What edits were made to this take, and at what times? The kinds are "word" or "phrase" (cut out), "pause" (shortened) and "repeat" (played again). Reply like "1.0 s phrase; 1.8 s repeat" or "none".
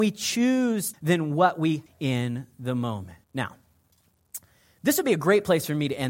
0.9 s phrase; 1.9 s phrase; 3.2 s pause